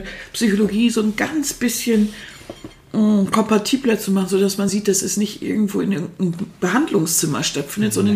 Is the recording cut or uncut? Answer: uncut